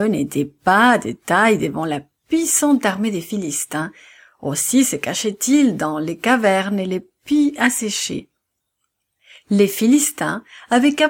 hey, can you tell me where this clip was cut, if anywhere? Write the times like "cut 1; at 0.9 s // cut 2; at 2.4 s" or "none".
none